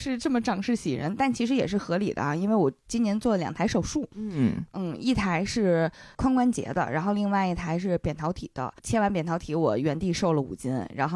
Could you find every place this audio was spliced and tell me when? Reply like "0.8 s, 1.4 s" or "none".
4.1 s, 8.8 s